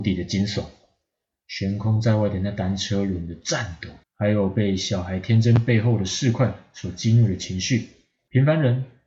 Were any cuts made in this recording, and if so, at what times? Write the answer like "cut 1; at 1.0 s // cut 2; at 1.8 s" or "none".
cut 1; at 4.0 s